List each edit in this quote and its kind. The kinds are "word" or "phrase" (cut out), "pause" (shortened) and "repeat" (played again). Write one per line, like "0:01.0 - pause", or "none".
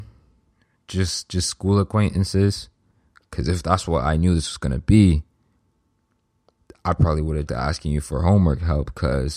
0:02.9 - pause
0:07.5 - phrase